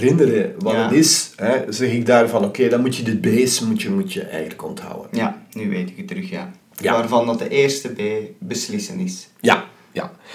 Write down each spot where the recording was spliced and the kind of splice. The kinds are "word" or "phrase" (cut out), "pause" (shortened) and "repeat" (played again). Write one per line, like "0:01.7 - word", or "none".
0:03.2 - word